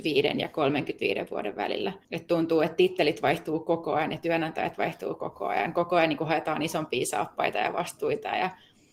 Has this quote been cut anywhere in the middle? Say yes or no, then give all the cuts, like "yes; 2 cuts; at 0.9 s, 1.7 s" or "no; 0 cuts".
yes; 1 cut; at 2.0 s